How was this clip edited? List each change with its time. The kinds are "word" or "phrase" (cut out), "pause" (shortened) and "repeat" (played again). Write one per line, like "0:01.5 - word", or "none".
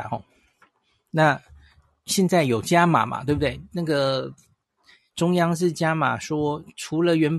none